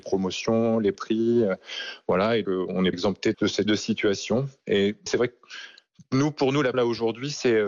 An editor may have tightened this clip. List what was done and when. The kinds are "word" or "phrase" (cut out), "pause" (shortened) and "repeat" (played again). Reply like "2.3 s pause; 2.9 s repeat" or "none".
0.9 s word; 2.4 s word; 2.9 s word; 3.3 s word; 3.7 s word; 5.1 s word; 6.7 s word